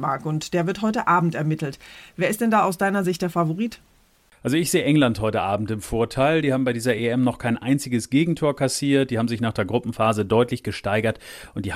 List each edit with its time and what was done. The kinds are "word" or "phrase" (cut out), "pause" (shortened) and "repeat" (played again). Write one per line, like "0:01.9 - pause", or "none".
none

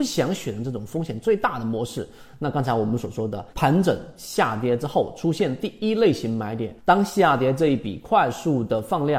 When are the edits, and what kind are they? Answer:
0:03.5 - pause
0:06.8 - pause

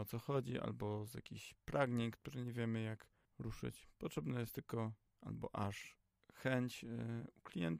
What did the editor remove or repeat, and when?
none

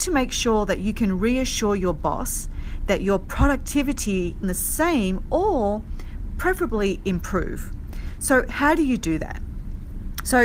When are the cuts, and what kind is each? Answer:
0:04.4 - phrase

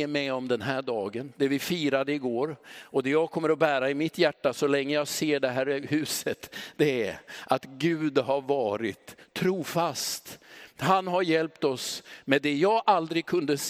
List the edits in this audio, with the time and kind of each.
none

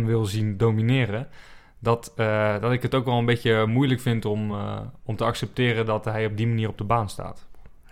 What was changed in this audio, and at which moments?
none

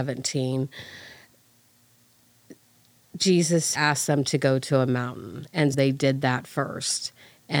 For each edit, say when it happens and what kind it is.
0:03.7 - word
0:05.7 - word

